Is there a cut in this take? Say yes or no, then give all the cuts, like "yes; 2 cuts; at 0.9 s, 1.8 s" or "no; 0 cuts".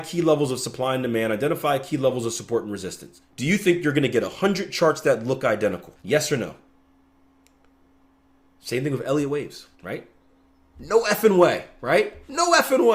yes; 3 cuts; at 3.3 s, 6.0 s, 9.7 s